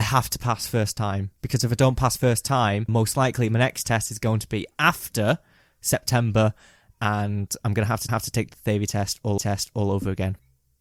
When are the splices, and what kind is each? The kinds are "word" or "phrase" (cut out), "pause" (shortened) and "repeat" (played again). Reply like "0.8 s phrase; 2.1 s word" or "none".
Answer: 2.9 s word; 8.1 s repeat; 9.4 s repeat

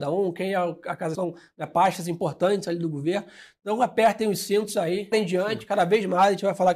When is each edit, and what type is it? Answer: 1.1 s phrase; 5.1 s word

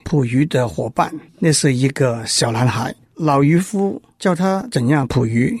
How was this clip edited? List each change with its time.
1.3 s pause; 3.1 s pause

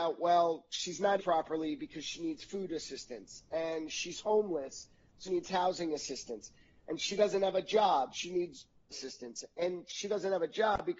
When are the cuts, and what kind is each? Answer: 1.2 s word; 5.3 s word; 8.1 s word; 8.9 s word

